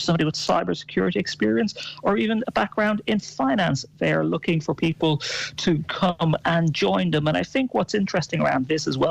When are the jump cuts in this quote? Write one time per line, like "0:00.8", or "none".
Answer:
none